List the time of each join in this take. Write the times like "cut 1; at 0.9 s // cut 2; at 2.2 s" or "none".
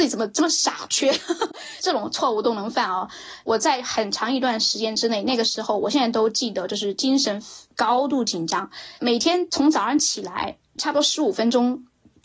cut 1; at 9.0 s